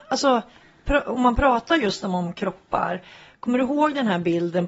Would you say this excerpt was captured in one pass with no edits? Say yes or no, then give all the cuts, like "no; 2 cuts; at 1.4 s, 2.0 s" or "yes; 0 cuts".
yes; 0 cuts